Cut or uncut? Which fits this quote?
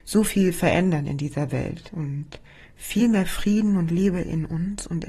uncut